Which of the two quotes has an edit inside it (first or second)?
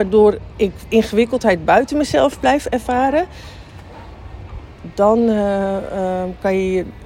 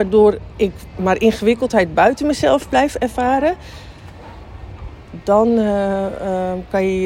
first